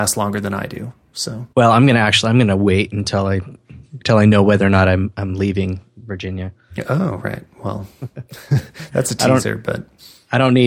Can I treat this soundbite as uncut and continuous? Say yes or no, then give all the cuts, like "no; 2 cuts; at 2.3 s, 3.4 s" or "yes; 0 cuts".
no; 2 cuts; at 1.5 s, 8.3 s